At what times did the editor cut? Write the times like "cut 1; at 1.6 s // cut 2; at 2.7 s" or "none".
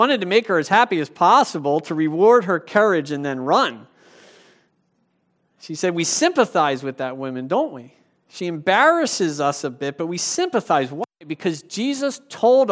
none